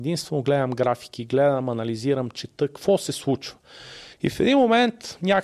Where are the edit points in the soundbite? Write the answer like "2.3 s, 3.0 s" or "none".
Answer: 4.1 s